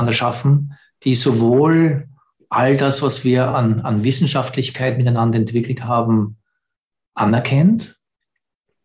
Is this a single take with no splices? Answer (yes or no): yes